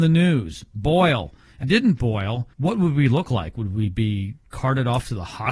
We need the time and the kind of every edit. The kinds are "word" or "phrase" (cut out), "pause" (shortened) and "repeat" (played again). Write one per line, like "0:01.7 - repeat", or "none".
0:01.6 - phrase
0:02.5 - pause